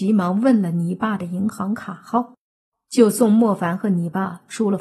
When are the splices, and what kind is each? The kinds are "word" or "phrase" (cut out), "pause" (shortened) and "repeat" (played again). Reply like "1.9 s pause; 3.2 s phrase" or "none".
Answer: none

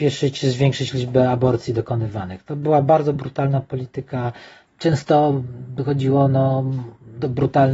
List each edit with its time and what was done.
none

